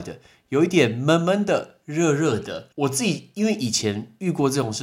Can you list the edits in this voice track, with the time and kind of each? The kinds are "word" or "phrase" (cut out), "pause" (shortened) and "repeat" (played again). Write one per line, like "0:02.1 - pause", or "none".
0:02.7 - pause